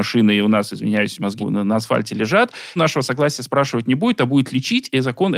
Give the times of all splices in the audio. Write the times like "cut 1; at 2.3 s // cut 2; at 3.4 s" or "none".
cut 1; at 1.4 s // cut 2; at 2.8 s